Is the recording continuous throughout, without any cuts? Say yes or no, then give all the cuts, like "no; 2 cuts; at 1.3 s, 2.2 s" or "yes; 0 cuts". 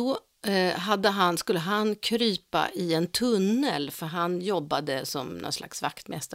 yes; 0 cuts